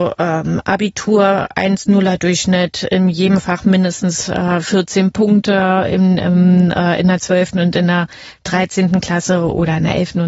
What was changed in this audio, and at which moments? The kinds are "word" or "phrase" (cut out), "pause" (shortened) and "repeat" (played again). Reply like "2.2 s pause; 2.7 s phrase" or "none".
none